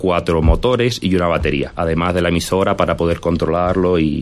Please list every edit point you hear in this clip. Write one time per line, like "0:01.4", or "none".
none